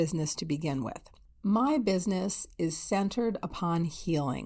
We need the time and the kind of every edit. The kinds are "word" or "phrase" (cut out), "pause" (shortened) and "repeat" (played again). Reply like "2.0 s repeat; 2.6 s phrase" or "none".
none